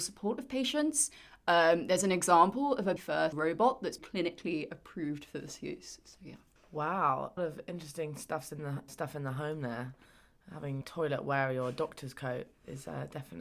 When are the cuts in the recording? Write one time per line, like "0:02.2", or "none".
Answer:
0:03.0
0:03.3
0:04.0
0:07.4
0:08.9
0:10.8